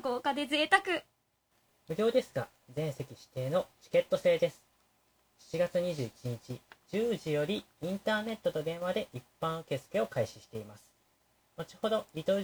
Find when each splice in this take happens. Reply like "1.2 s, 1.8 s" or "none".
none